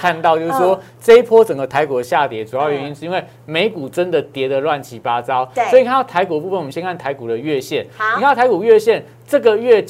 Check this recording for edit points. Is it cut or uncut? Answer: uncut